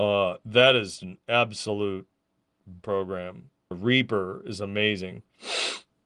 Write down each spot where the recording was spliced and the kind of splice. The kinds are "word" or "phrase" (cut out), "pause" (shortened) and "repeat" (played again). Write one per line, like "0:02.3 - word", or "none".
0:01.0 - word
0:02.8 - word
0:03.7 - word

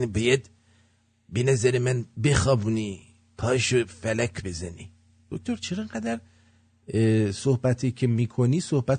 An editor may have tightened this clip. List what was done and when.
0:02.1 - pause

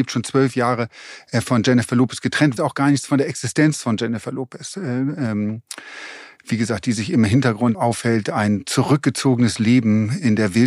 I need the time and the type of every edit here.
0:02.6 - word
0:07.7 - word

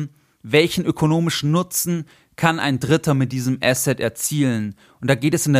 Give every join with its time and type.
none

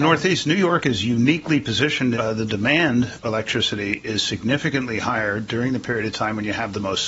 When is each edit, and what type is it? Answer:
0:02.1 - phrase
0:03.2 - word

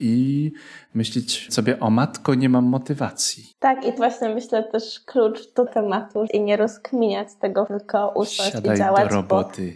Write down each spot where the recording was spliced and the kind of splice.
0:01.5 - word
0:03.5 - pause
0:04.0 - word
0:05.7 - phrase
0:06.3 - phrase
0:07.7 - word

